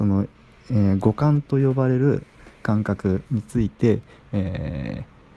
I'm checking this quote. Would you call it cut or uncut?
cut